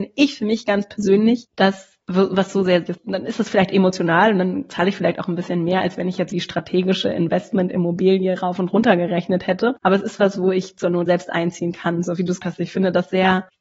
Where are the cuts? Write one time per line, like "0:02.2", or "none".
0:01.5
0:02.9
0:06.3
0:09.8
0:11.1
0:12.4